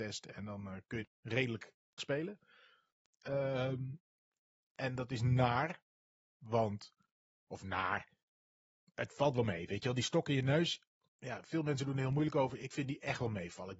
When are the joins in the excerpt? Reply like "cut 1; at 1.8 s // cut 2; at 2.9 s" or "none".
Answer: cut 1; at 1.0 s // cut 2; at 2.0 s